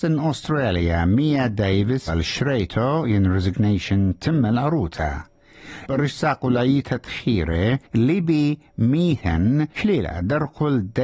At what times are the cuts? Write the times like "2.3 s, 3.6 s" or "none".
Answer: 2.1 s, 5.9 s, 7.9 s, 9.7 s